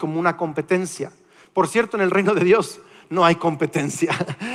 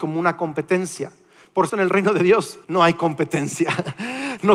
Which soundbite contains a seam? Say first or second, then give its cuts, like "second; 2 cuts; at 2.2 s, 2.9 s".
second; 2 cuts; at 1.7 s, 2.6 s